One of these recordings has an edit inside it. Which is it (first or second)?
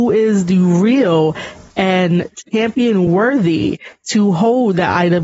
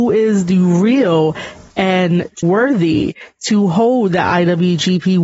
second